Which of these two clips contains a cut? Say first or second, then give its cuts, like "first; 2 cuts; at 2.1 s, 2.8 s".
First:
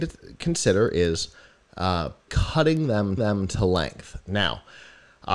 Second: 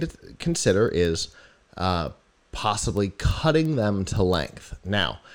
first; 2 cuts; at 2.3 s, 3.2 s